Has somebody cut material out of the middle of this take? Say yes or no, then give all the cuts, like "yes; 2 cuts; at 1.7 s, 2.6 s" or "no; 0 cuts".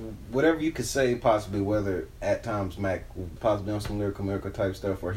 yes; 1 cut; at 3.4 s